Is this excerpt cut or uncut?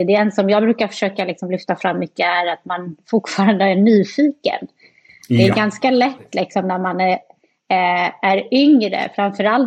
uncut